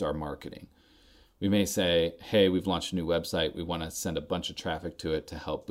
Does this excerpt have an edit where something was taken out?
no; 0 cuts

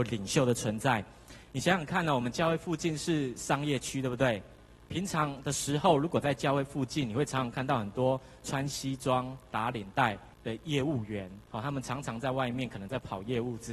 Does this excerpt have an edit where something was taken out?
yes; 2 cuts; at 10.3 s, 11.5 s

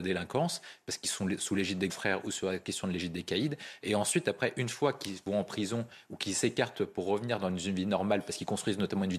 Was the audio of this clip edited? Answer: yes; 1 cut; at 1.9 s

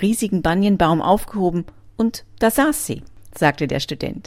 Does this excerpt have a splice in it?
no; 0 cuts

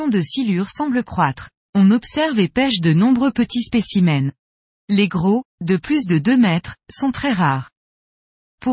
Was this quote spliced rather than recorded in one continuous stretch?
yes; 1 cut; at 1.6 s

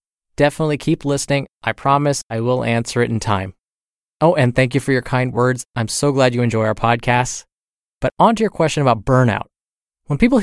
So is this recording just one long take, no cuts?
yes; 0 cuts

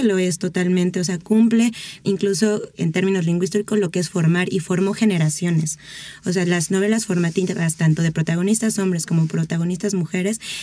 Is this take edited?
yes; 1 cut; at 2.0 s

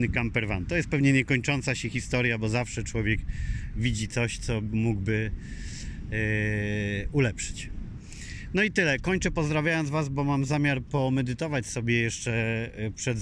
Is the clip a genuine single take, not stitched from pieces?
yes; 0 cuts

